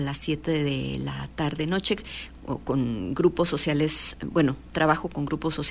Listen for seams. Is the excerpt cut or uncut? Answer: uncut